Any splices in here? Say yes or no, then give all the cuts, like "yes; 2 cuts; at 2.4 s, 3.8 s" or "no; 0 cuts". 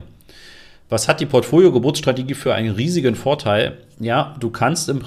no; 0 cuts